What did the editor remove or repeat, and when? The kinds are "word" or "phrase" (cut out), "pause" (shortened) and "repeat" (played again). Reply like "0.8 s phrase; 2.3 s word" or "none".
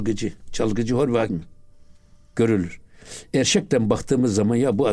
1.3 s word